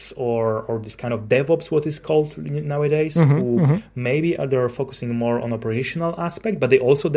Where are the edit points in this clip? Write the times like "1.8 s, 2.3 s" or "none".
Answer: none